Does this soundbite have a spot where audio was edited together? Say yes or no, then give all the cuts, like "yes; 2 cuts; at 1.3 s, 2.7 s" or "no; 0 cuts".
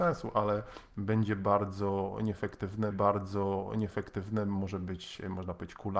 yes; 1 cut; at 2.9 s